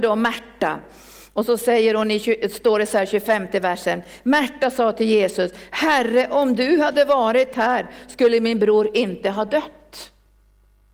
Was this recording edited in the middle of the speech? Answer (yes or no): no